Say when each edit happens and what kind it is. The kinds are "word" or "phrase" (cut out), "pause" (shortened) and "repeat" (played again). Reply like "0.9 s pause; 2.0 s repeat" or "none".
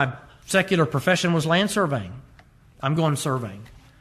none